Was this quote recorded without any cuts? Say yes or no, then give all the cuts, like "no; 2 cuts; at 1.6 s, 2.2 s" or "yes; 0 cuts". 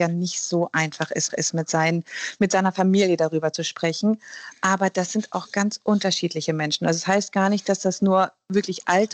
no; 1 cut; at 1.3 s